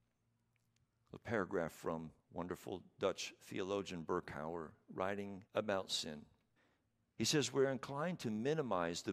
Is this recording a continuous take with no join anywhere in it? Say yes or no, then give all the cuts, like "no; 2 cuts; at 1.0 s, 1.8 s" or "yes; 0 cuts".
no; 3 cuts; at 2.2 s, 5.5 s, 6.6 s